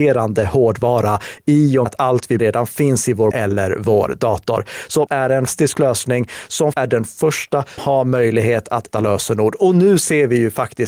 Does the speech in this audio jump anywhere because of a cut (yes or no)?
yes